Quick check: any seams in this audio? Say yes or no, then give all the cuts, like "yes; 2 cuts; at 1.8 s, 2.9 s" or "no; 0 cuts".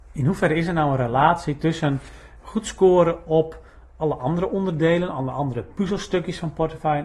no; 0 cuts